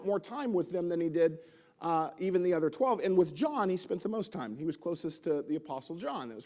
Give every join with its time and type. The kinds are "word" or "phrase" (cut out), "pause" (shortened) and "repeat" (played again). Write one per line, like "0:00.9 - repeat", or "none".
none